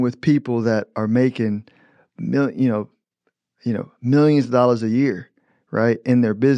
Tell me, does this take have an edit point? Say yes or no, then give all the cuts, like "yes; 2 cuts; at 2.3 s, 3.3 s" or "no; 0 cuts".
no; 0 cuts